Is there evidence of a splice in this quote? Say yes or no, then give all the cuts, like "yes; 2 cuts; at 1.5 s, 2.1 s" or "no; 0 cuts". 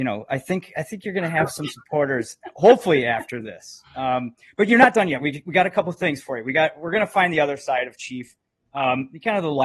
no; 0 cuts